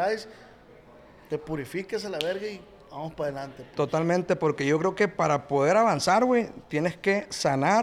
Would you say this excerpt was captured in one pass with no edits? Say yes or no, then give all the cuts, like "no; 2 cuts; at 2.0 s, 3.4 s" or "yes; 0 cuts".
yes; 0 cuts